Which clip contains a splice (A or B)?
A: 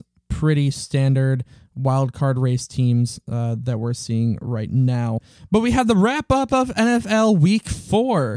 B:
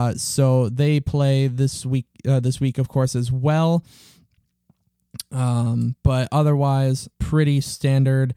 B